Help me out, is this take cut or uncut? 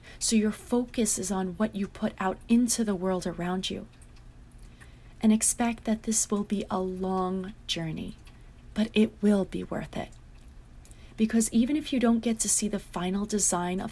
uncut